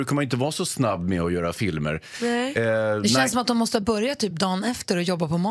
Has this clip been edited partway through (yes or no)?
no